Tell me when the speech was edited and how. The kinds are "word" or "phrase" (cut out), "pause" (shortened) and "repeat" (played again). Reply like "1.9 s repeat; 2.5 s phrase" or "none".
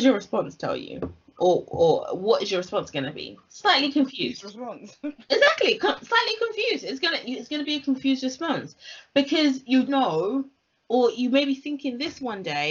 9.9 s word

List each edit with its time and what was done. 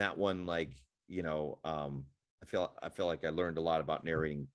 2.2 s pause

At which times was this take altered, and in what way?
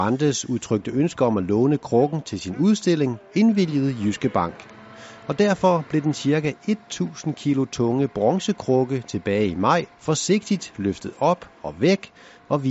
9.9 s pause

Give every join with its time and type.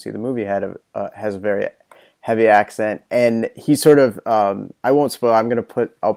none

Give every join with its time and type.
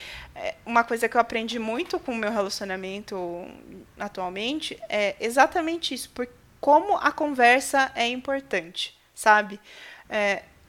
none

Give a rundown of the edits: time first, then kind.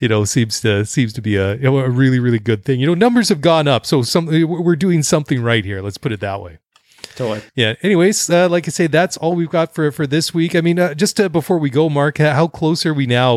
7.5 s pause

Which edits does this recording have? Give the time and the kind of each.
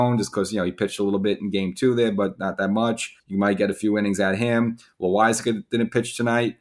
3.2 s pause

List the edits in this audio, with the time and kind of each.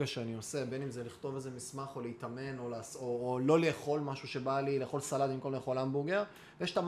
none

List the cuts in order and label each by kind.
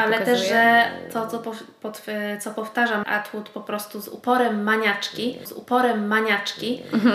3.0 s word; 5.5 s repeat

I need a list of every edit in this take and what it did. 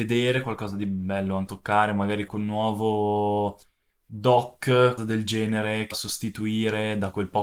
1.5 s word; 2.3 s word; 5.0 s word; 5.9 s word

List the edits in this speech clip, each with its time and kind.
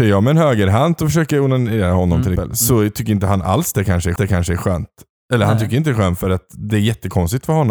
2.4 s word; 4.2 s repeat

